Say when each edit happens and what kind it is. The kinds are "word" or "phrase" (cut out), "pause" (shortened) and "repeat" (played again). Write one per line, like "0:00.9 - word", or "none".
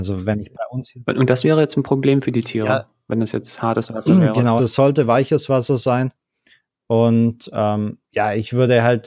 0:04.6 - word
0:08.0 - pause